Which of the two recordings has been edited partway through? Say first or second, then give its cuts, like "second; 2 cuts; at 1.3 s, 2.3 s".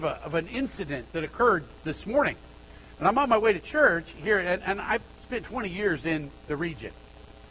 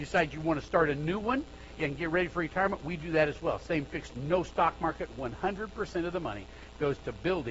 second; 2 cuts; at 1.8 s, 4.1 s